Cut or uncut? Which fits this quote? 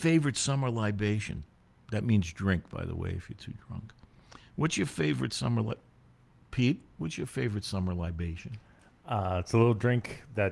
cut